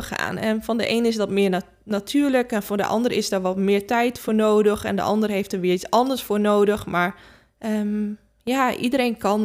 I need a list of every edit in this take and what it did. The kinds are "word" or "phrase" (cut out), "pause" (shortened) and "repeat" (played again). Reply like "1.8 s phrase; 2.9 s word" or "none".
none